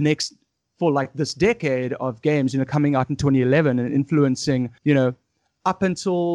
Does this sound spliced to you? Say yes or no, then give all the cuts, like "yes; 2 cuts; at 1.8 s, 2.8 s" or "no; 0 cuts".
yes; 1 cut; at 4.8 s